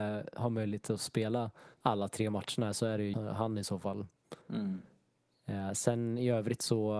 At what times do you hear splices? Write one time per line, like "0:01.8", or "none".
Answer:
0:01.7
0:03.1
0:04.4